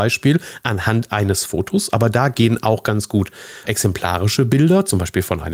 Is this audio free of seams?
no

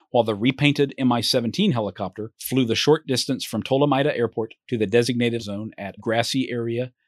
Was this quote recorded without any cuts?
no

